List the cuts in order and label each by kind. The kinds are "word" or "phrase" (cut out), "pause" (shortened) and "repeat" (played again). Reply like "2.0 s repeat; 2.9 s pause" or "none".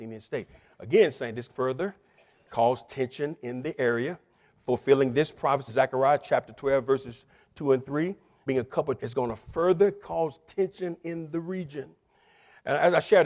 1.5 s word; 5.7 s word; 8.5 s word; 9.0 s word